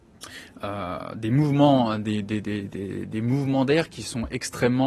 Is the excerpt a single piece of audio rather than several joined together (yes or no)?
yes